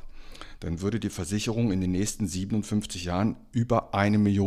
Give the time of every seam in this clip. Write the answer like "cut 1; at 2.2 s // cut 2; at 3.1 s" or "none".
none